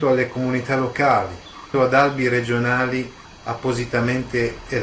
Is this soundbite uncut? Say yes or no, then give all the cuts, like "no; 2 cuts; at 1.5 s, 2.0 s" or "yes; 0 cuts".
no; 1 cut; at 1.7 s